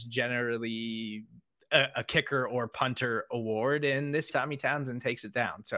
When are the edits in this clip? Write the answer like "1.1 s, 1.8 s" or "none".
4.3 s